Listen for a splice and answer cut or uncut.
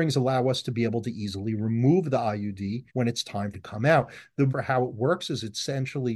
cut